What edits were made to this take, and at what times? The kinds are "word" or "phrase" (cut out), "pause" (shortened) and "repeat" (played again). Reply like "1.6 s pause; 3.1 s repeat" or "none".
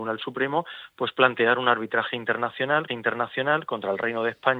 2.9 s repeat

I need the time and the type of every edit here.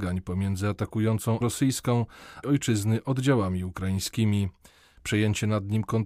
1.4 s word; 2.4 s phrase

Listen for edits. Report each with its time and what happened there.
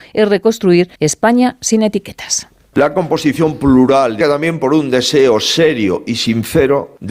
0.9 s pause; 4.2 s phrase

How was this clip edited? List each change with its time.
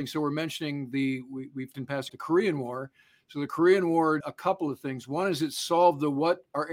1.7 s word; 2.1 s word; 4.2 s word

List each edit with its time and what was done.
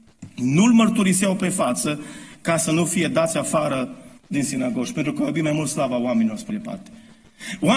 4.2 s pause; 6.5 s word

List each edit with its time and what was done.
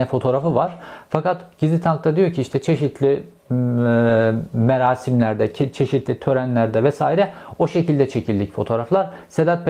none

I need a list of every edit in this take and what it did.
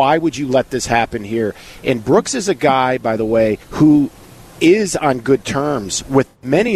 3.6 s pause

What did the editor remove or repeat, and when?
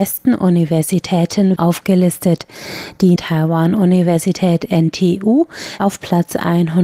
1.6 s word; 3.2 s word; 5.8 s word

